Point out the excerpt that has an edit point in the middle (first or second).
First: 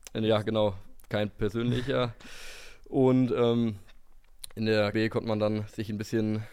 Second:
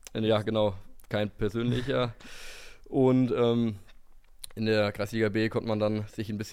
first